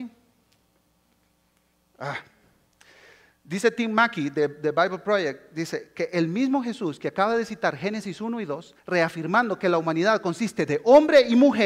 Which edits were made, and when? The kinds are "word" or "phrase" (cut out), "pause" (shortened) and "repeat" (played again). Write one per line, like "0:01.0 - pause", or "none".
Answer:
0:08.8 - pause